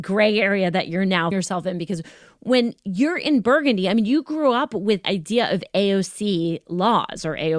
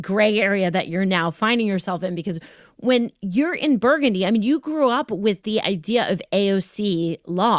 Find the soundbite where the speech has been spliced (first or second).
first